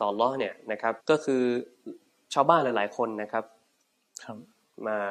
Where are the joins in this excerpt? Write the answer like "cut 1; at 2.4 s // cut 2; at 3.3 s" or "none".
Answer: cut 1; at 1.0 s